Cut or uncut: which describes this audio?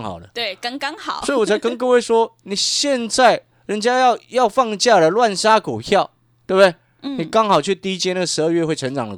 uncut